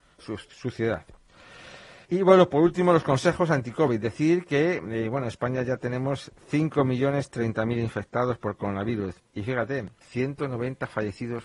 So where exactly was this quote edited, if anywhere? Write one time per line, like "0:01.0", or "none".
0:02.0
0:10.0